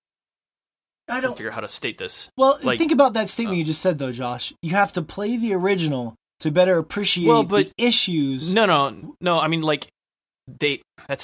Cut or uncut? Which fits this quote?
uncut